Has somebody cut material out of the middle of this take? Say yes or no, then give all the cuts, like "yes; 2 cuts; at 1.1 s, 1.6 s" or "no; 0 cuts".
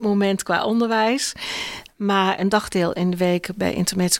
no; 0 cuts